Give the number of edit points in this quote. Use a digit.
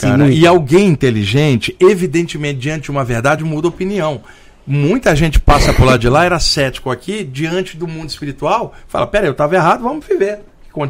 0